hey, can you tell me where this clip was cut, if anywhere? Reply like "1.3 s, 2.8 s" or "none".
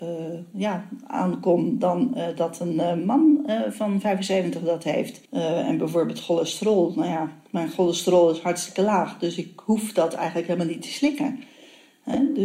5.2 s